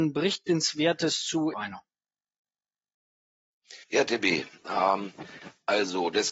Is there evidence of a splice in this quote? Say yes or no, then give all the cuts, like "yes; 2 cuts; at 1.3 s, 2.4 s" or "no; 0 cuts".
yes; 2 cuts; at 1.5 s, 3.8 s